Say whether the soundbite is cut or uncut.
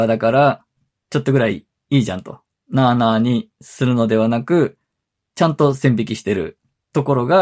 uncut